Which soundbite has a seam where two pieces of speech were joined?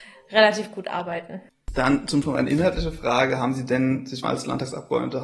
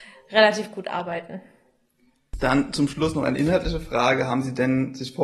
first; 3 cuts; at 1.5 s, 2.2 s, 4.2 s

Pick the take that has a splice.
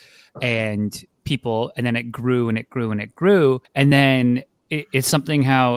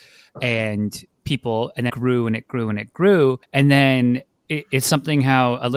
second; 1 cut; at 1.9 s

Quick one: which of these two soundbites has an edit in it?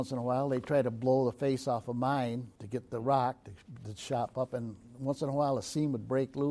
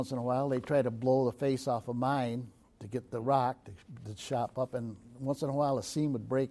first; 1 cut; at 2.6 s

